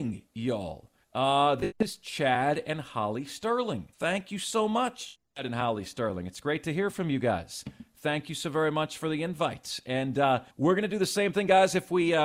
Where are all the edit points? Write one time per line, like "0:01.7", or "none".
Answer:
0:01.0
0:03.9
0:10.5

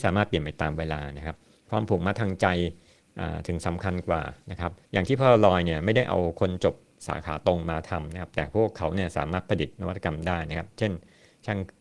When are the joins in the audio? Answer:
0:04.8

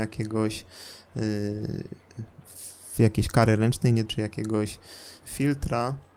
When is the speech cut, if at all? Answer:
0:04.1
0:05.2

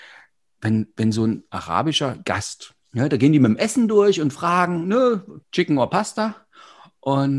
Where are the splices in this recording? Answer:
0:02.8
0:05.4

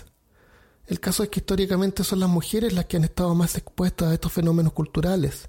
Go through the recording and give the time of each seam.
none

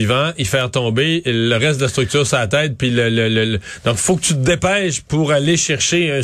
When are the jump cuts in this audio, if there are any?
none

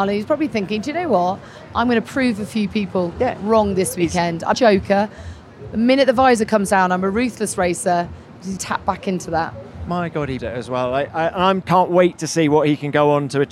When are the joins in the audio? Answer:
0:04.5
0:08.6
0:10.4
0:11.6

